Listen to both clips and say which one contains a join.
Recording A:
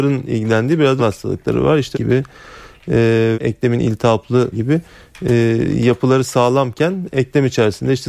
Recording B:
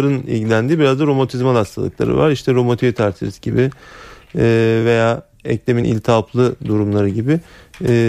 A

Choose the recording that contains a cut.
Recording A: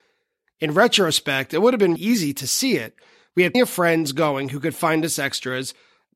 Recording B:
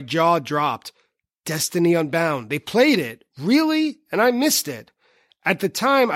A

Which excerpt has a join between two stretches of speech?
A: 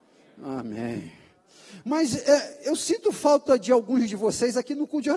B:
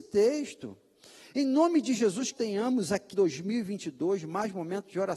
B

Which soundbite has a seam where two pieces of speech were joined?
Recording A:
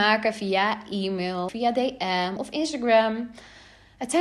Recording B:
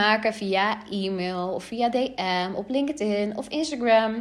A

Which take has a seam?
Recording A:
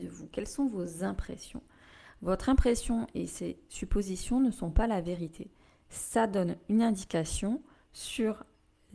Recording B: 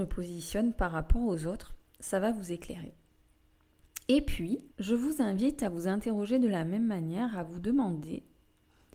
B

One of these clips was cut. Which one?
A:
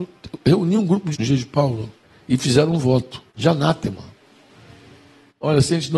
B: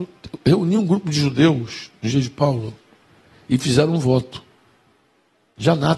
A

